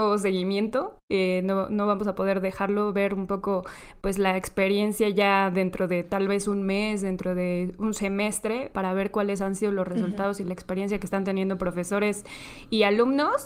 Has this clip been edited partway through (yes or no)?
yes